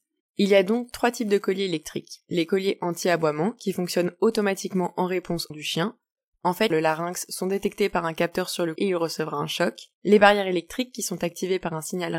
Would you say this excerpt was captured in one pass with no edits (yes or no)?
no